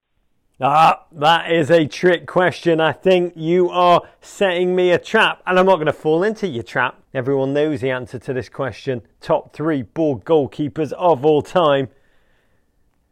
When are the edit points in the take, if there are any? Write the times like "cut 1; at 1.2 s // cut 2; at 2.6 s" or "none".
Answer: cut 1; at 7.0 s

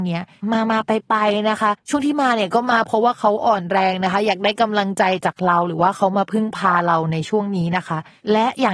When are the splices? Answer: cut 1; at 1.8 s

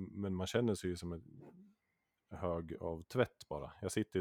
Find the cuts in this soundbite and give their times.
none

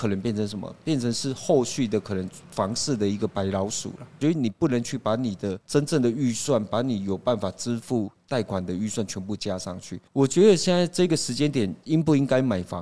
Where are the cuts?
cut 1; at 5.6 s // cut 2; at 10.1 s

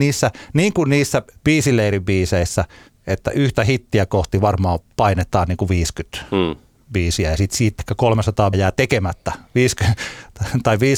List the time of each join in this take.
cut 1; at 6.8 s // cut 2; at 7.8 s // cut 3; at 8.5 s

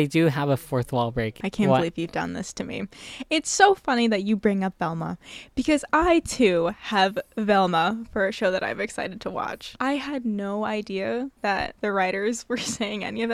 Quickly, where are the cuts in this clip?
cut 1; at 11.4 s

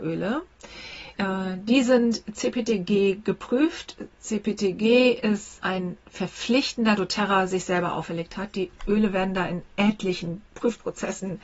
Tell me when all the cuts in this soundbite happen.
cut 1; at 1.1 s // cut 2; at 4.1 s // cut 3; at 5.6 s // cut 4; at 7.0 s

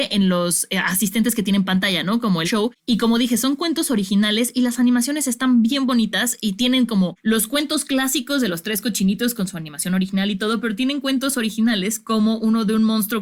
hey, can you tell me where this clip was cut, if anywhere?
cut 1; at 2.4 s

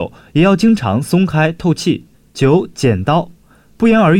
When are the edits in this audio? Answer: cut 1; at 2.1 s

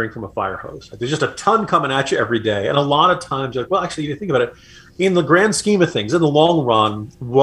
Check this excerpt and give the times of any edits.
none

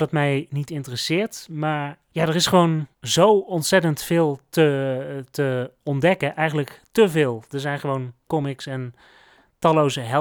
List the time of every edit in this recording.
cut 1; at 2.9 s // cut 2; at 8.3 s

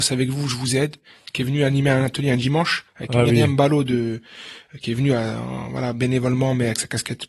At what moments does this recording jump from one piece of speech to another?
cut 1; at 2.9 s

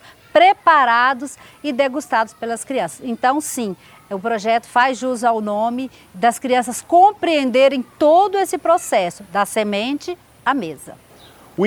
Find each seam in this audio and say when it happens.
none

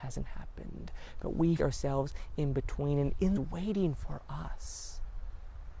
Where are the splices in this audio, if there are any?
cut 1; at 1.6 s // cut 2; at 3.3 s

